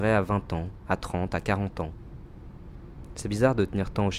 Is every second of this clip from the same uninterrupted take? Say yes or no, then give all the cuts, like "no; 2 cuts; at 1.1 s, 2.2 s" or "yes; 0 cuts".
yes; 0 cuts